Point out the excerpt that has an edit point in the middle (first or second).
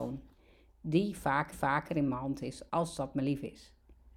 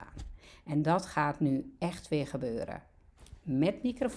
first